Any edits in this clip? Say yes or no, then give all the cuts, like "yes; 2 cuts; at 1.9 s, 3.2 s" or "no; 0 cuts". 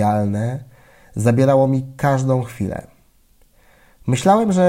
no; 0 cuts